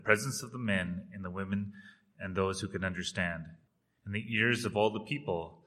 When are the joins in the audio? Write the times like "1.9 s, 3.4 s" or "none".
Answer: none